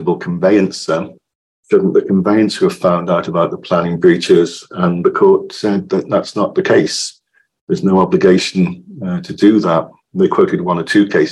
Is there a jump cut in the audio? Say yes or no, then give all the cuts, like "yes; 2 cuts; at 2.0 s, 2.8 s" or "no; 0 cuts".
no; 0 cuts